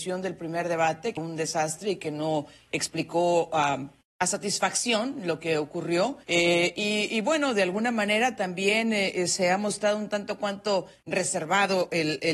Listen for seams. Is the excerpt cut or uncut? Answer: cut